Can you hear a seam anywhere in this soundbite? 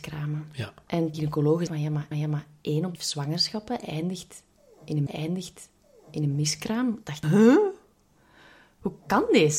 yes; 6 cuts; at 1.1 s, 1.7 s, 2.1 s, 3.0 s, 5.1 s, 7.2 s

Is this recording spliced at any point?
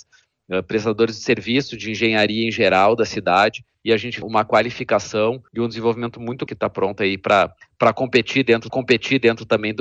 yes; 5 cuts; at 3.7 s, 4.2 s, 5.5 s, 6.5 s, 8.7 s

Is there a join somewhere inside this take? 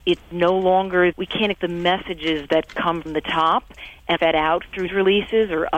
yes; 5 cuts; at 1.1 s, 1.5 s, 3.1 s, 4.2 s, 4.9 s

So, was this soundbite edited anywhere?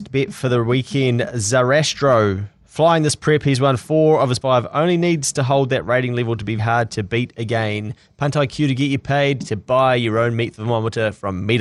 yes; 2 cuts; at 4.4 s, 6.6 s

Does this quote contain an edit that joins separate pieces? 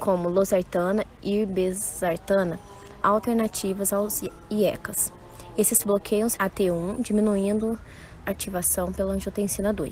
yes; 5 cuts; at 1.2 s, 3.0 s, 5.8 s, 6.4 s, 8.2 s

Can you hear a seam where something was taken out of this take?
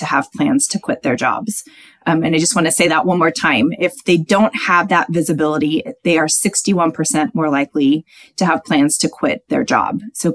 no; 0 cuts

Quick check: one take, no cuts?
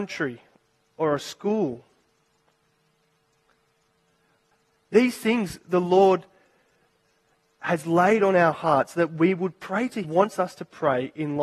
no; 1 cut; at 10.0 s

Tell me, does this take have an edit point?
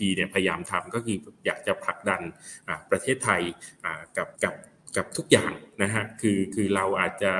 yes; 1 cut; at 4.3 s

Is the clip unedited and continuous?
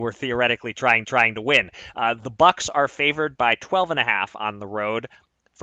no; 1 cut; at 1.0 s

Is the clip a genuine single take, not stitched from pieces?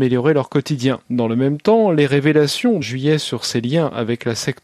no; 2 cuts; at 1.0 s, 2.8 s

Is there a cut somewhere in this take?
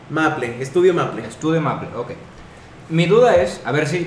no; 0 cuts

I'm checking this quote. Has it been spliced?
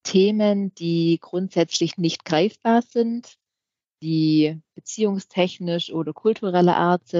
no; 0 cuts

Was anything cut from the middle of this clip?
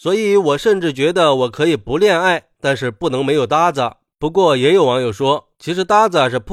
no; 0 cuts

